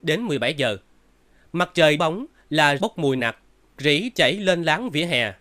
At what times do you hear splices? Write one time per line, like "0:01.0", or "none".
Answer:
0:02.0
0:02.8
0:03.2
0:03.8